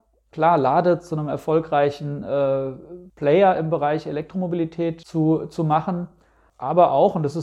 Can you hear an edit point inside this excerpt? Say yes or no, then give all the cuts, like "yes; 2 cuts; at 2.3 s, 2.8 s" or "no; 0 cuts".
no; 0 cuts